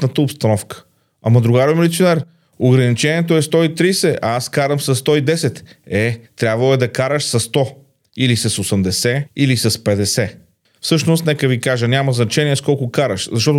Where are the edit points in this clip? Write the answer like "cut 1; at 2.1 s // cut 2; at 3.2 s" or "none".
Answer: none